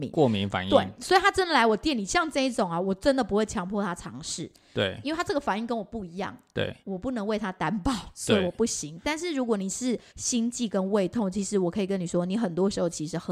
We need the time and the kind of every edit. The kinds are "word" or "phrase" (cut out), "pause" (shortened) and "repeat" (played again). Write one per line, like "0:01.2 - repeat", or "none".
0:06.8 - pause
0:10.1 - pause